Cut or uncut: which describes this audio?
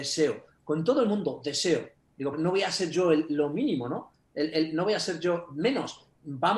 cut